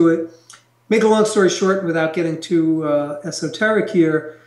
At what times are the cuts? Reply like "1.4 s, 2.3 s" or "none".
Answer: none